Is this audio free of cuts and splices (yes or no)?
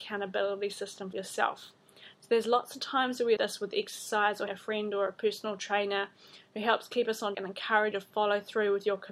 no